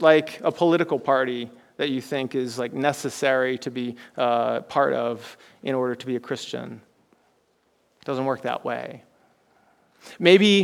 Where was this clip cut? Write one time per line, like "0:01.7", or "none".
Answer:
none

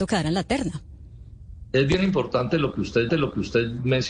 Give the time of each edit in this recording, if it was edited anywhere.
0:03.1

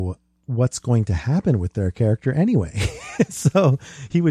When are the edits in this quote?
none

